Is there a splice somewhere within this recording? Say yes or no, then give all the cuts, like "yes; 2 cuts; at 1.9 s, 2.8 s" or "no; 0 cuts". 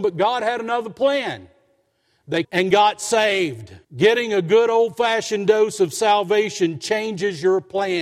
yes; 2 cuts; at 2.4 s, 3.8 s